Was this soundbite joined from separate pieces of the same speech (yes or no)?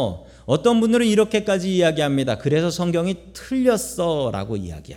no